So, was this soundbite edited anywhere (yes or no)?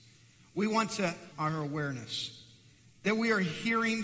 yes